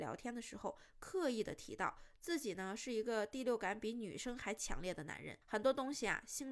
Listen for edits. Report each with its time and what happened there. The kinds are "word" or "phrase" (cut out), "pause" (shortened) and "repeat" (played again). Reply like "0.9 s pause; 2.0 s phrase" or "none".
5.4 s pause